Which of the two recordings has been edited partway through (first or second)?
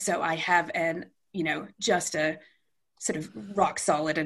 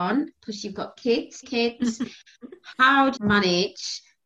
second